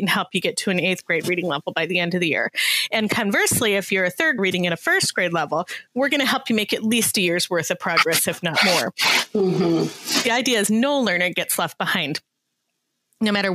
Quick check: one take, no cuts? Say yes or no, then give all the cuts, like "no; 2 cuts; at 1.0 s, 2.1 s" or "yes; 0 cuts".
no; 2 cuts; at 4.4 s, 5.9 s